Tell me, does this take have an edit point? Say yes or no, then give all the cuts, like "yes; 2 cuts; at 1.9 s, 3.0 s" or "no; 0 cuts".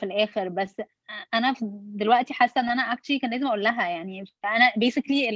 no; 0 cuts